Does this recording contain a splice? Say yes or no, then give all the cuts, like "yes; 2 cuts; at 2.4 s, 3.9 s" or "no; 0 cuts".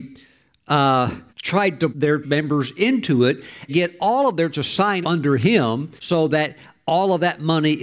yes; 7 cuts; at 1.3 s, 1.9 s, 2.2 s, 3.7 s, 4.5 s, 5.0 s, 6.0 s